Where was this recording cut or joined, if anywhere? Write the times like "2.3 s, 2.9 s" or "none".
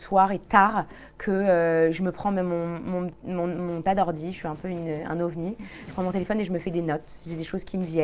3.8 s